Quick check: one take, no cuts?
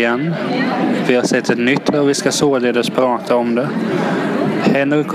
no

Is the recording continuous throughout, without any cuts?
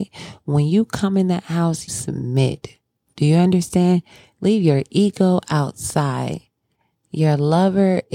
no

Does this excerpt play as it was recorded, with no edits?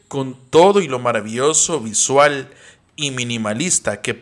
yes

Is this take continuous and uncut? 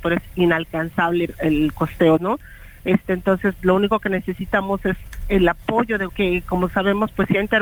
no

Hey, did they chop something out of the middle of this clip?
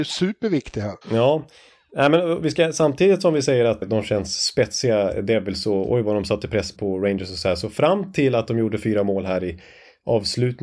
yes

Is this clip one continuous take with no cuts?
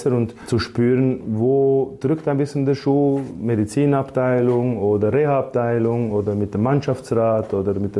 yes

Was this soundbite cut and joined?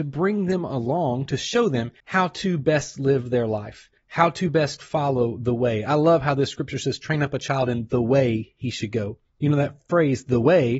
yes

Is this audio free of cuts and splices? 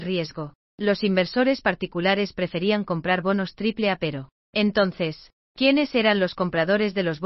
yes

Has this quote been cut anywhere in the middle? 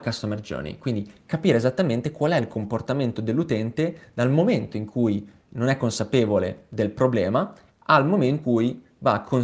yes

